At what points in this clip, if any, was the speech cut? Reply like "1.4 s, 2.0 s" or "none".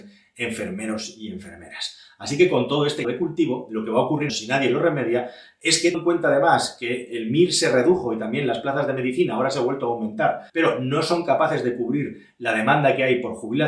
3.0 s, 4.3 s, 5.9 s, 10.5 s